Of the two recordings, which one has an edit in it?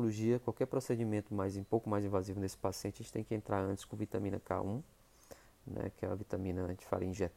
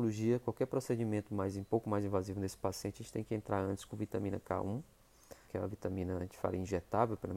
second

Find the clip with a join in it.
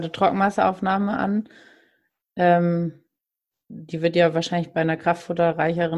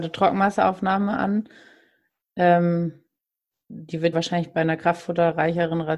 second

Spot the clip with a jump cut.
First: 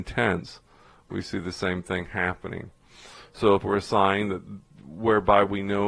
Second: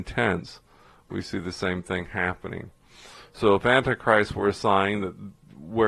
first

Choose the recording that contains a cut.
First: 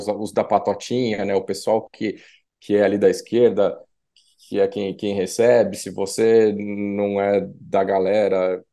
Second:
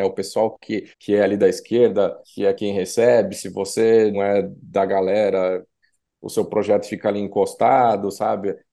second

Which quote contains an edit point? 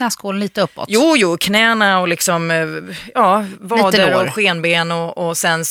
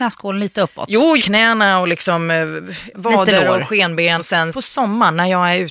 second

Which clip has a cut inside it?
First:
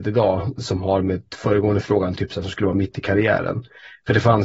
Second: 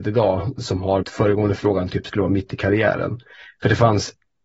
second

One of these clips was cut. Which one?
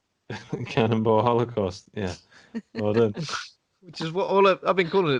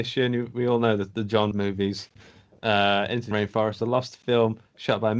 second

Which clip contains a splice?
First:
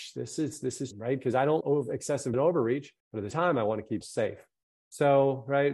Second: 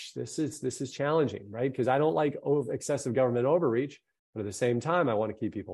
first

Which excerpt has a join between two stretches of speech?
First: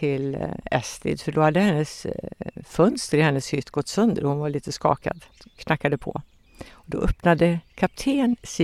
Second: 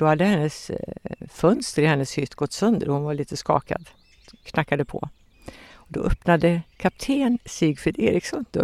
first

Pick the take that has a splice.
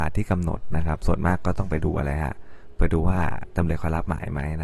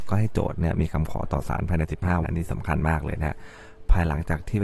second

